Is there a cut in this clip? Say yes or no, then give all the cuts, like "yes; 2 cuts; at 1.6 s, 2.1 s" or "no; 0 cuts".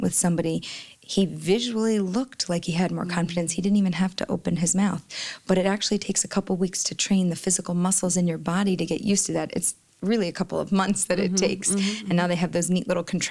no; 0 cuts